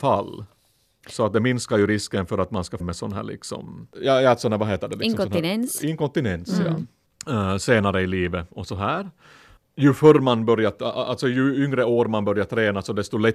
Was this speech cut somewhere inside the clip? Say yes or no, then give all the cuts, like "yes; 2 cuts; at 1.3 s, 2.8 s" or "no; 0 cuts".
yes; 1 cut; at 2.8 s